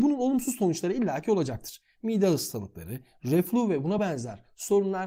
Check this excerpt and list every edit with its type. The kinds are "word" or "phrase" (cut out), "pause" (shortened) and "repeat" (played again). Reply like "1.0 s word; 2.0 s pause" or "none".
none